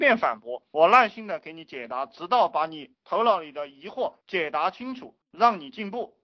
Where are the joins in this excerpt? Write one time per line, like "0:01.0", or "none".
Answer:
0:04.2
0:05.3